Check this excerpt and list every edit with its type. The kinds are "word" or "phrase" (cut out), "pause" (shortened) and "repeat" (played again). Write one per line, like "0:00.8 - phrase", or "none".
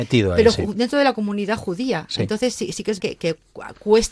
0:03.0 - word